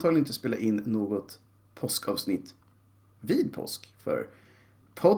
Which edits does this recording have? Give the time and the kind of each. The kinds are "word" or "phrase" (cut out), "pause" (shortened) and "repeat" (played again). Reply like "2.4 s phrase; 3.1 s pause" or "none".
none